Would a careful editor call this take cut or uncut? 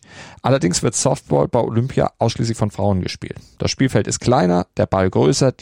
uncut